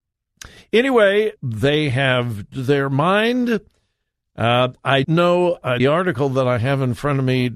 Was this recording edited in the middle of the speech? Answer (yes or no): yes